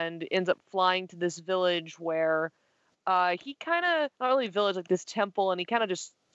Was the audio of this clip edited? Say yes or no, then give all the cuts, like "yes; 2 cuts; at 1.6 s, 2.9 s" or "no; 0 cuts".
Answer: yes; 2 cuts; at 4.1 s, 4.9 s